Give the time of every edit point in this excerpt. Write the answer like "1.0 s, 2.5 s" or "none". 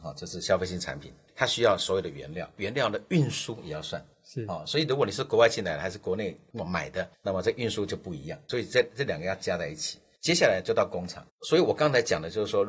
2.6 s, 8.4 s